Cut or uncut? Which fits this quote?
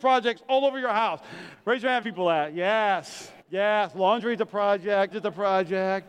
cut